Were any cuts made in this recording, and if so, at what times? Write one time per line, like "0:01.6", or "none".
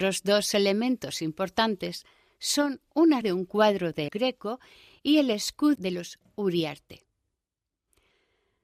0:03.2
0:04.1
0:05.8